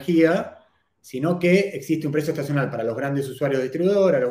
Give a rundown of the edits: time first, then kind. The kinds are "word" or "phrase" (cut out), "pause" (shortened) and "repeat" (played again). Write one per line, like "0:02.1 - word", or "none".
none

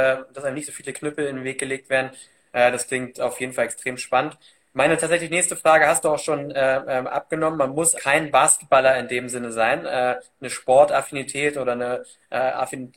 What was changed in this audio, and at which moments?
0:07.9 - word

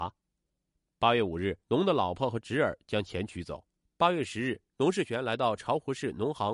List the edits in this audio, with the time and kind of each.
0:01.6 - pause
0:03.8 - pause
0:04.7 - pause

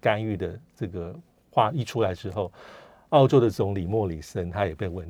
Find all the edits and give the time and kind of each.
none

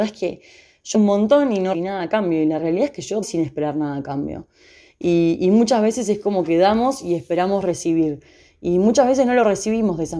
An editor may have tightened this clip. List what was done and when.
0:00.9 - word
0:01.7 - word
0:03.2 - word

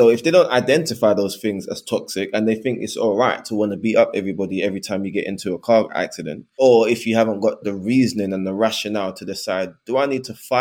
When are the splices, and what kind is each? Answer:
0:07.6 - word

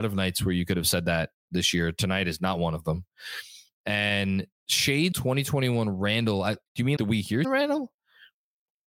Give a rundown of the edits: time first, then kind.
0:05.1 - word
0:06.7 - pause
0:07.0 - word
0:07.4 - word

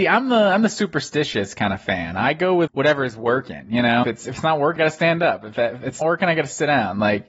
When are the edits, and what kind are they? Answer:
0:02.7 - word
0:04.0 - word
0:04.8 - word
0:06.0 - word

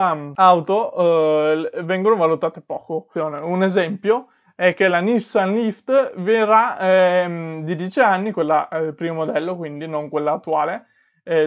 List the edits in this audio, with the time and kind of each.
none

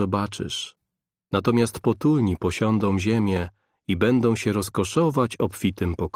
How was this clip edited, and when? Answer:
none

